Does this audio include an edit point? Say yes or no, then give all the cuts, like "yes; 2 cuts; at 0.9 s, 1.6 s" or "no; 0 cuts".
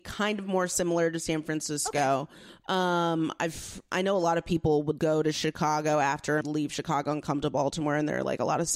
yes; 2 cuts; at 5.0 s, 6.4 s